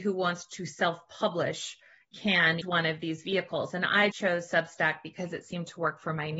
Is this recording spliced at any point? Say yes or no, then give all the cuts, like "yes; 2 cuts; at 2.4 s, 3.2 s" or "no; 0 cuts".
yes; 2 cuts; at 2.6 s, 4.1 s